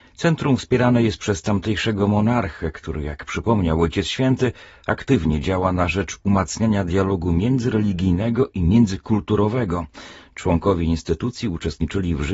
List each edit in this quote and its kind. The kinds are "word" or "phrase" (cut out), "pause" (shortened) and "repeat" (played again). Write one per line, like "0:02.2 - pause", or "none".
none